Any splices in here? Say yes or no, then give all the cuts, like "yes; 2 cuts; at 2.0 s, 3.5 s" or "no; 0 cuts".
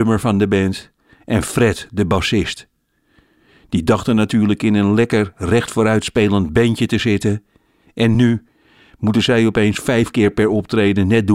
no; 0 cuts